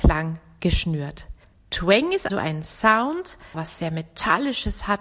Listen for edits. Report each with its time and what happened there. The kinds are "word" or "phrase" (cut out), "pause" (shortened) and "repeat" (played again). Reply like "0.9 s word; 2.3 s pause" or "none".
1.4 s pause; 2.3 s word; 3.5 s word